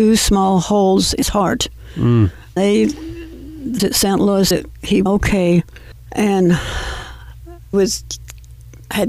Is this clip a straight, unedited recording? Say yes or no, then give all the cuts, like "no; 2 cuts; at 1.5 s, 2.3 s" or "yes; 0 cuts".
no; 6 cuts; at 1.2 s, 2.6 s, 3.8 s, 4.5 s, 5.1 s, 7.7 s